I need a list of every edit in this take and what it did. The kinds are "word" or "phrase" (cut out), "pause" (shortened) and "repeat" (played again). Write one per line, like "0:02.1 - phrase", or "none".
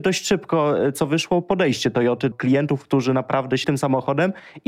0:02.3 - word
0:03.6 - word